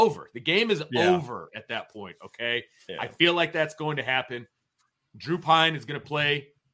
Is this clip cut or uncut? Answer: uncut